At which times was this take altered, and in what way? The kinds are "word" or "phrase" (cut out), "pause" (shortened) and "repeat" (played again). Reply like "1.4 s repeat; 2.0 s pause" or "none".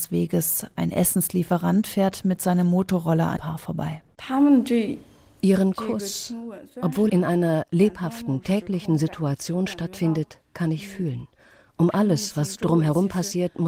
3.4 s word; 7.1 s word